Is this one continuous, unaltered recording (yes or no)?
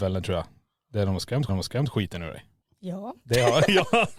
no